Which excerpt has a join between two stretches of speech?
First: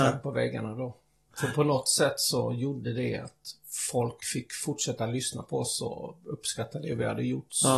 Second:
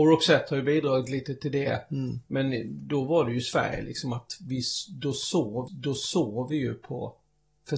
second; 1 cut; at 5.7 s

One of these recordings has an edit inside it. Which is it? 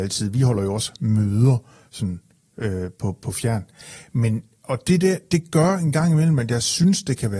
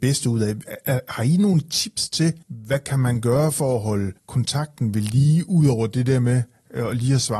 second; 2 cuts; at 2.4 s, 4.2 s

